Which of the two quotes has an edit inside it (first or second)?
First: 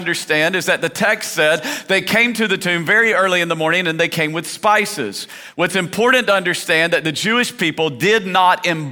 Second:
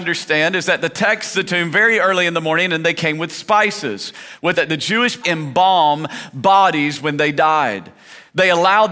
second